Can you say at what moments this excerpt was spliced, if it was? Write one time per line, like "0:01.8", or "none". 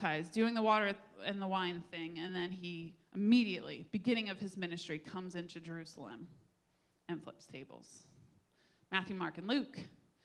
none